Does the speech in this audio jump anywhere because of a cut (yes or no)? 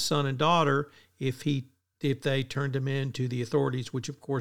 no